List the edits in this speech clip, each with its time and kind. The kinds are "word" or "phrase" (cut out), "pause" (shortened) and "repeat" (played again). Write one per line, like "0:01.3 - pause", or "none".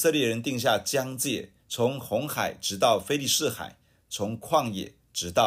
0:01.6 - pause